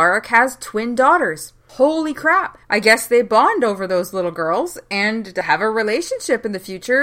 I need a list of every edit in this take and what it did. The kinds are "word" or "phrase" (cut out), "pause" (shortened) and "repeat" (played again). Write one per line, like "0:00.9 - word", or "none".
0:02.6 - pause